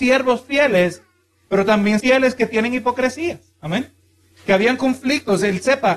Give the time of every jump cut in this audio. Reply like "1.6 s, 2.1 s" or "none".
2.0 s